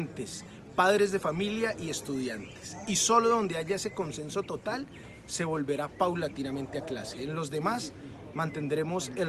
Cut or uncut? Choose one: uncut